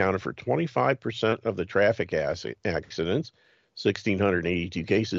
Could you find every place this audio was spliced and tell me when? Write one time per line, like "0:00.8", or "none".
none